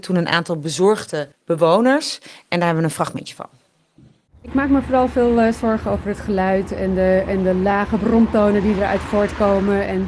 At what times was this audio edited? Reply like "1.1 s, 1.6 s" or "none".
none